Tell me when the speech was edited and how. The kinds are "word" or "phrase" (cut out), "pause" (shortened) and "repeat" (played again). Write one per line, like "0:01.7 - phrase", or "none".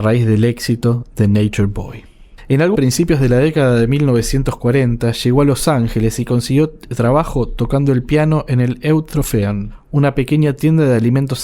0:02.7 - phrase